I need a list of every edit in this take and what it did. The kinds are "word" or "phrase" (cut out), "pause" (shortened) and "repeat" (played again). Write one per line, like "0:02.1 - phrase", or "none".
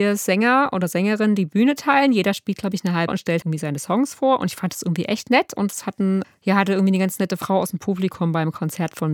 0:03.1 - word
0:03.4 - word
0:06.2 - word